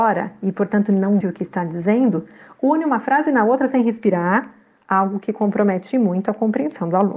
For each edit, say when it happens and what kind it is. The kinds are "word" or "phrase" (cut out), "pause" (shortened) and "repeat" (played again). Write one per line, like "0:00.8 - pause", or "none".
0:01.2 - word